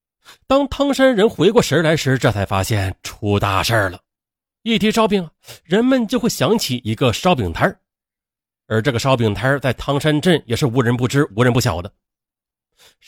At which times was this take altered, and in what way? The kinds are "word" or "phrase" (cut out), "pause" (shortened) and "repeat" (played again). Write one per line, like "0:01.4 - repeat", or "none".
0:04.2 - pause